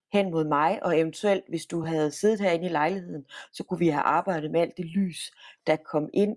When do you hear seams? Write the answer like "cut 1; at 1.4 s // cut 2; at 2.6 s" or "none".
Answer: none